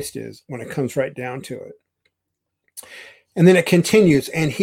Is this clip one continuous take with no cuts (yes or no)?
yes